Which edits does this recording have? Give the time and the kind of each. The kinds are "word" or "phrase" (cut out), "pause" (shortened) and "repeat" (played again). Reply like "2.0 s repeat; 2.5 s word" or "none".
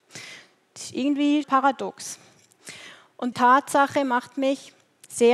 1.4 s word; 3.3 s word